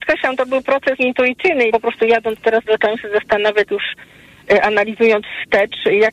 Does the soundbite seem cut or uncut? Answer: cut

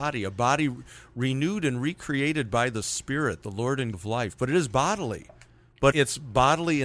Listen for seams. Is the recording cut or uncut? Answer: cut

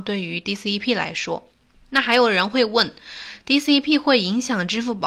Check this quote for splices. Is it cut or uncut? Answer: uncut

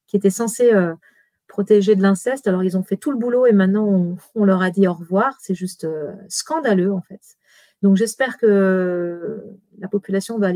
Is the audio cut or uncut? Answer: uncut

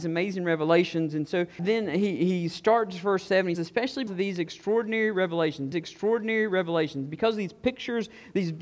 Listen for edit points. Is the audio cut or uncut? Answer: cut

